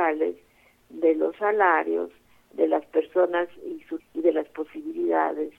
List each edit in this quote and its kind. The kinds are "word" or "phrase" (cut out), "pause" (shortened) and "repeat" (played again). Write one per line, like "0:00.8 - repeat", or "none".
0:04.0 - word